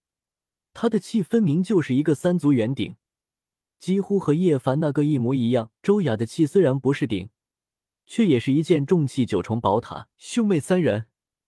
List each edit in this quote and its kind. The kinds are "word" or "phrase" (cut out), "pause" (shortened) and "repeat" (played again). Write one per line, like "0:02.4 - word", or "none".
0:05.8 - pause
0:10.1 - pause